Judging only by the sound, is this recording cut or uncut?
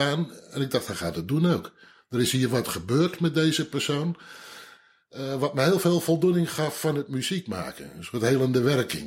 uncut